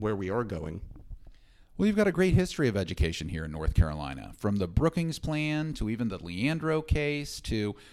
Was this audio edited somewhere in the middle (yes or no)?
no